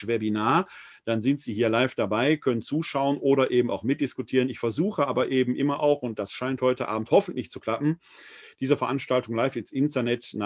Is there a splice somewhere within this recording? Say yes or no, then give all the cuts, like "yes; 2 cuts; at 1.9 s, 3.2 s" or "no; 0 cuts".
no; 0 cuts